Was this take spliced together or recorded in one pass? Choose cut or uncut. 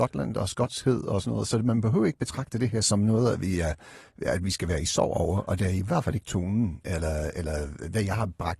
uncut